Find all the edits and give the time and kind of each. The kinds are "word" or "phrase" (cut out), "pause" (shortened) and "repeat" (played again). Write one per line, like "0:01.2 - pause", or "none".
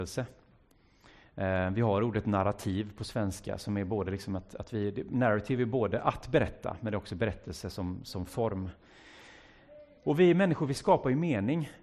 none